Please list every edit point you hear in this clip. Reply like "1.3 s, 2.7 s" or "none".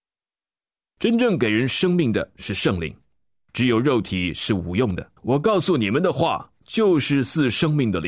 5.2 s

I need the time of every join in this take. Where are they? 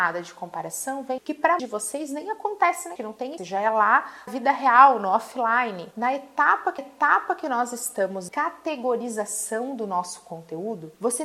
1.2 s, 1.6 s, 3.0 s, 3.4 s, 4.3 s, 6.8 s, 8.3 s

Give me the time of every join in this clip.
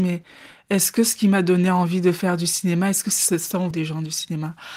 3.7 s

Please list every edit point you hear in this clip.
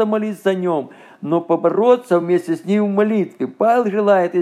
none

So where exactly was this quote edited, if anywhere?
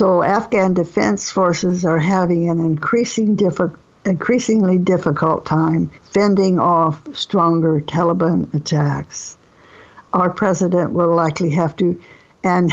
6.0 s

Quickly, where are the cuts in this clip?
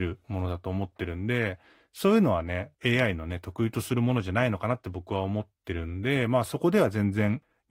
none

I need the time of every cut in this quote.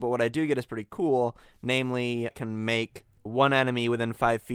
2.3 s, 3.3 s

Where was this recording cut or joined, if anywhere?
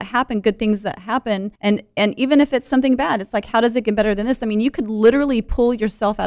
1.6 s

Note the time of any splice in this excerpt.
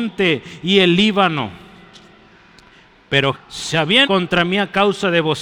3.3 s, 4.0 s

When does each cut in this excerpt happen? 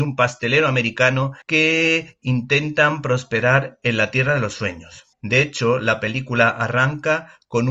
1.4 s, 5.1 s

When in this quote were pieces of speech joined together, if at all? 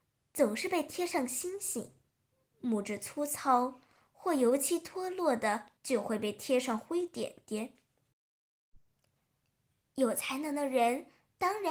2.1 s, 5.8 s

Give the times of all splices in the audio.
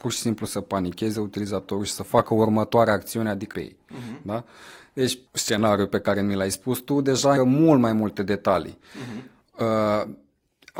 3.5 s, 5.3 s, 7.4 s

